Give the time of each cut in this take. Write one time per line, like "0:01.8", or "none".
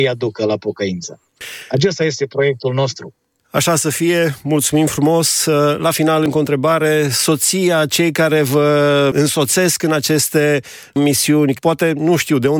0:11.5